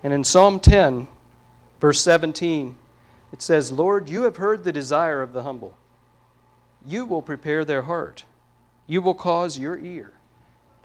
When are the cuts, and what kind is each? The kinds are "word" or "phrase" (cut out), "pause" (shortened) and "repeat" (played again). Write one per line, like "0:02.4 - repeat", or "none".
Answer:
none